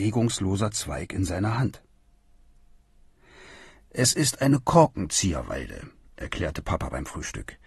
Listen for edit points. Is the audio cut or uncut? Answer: uncut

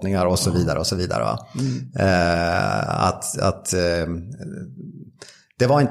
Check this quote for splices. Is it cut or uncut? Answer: uncut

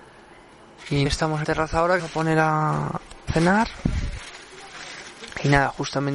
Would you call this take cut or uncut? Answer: cut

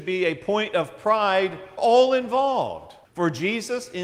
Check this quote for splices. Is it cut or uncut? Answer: cut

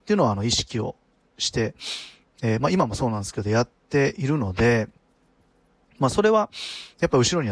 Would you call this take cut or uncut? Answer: uncut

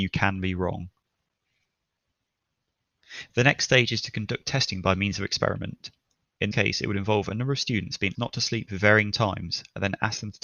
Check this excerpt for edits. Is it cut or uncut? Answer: cut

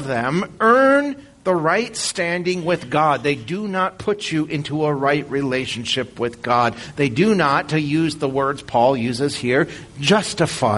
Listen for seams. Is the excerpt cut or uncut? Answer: uncut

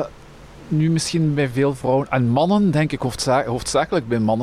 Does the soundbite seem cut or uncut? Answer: uncut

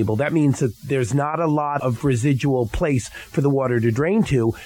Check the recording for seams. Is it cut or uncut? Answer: cut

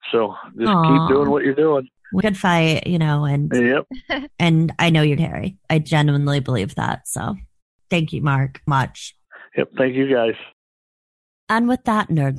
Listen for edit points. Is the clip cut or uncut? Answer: cut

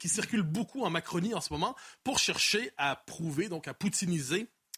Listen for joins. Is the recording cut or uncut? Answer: uncut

